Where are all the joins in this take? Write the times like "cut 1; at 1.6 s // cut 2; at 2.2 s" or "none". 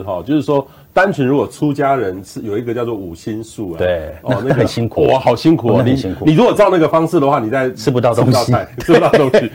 none